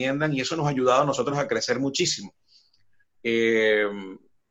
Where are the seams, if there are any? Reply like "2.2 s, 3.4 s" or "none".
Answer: none